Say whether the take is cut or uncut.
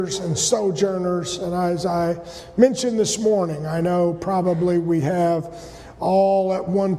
uncut